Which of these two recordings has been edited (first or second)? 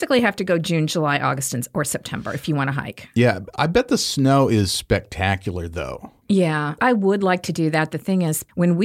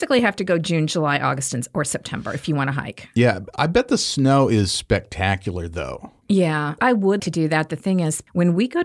second